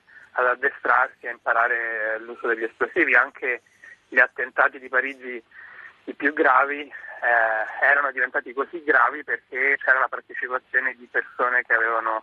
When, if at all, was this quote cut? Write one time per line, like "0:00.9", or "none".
0:09.7